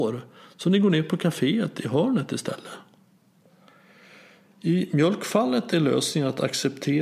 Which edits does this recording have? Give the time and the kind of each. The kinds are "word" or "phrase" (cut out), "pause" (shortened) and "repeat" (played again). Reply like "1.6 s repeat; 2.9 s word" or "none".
none